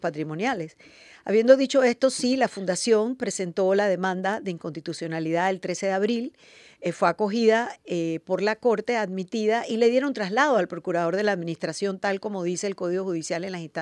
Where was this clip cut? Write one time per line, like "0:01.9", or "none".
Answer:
none